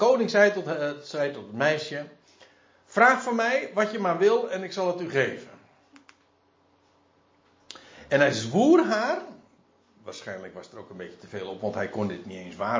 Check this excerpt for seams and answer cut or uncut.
uncut